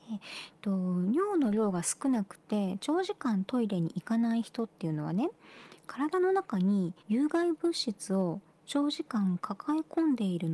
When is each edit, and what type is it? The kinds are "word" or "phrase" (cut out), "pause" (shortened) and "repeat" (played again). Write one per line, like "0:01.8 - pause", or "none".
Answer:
0:07.0 - pause